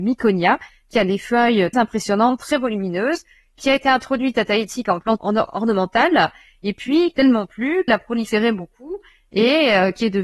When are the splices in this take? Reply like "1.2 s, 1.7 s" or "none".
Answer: 1.7 s, 5.2 s, 7.2 s, 7.9 s